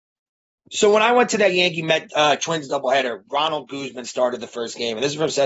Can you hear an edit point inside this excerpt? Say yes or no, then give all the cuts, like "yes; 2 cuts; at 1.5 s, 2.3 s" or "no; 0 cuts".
no; 0 cuts